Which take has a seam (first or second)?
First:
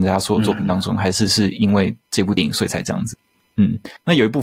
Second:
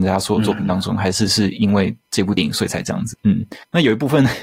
second